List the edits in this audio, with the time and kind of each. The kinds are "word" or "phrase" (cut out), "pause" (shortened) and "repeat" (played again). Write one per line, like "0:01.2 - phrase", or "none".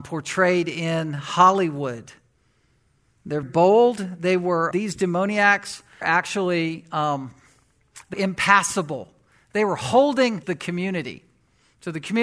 0:03.4 - word
0:04.7 - word
0:06.0 - word
0:08.1 - word
0:10.4 - word